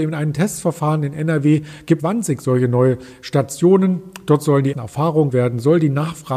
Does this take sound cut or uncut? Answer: cut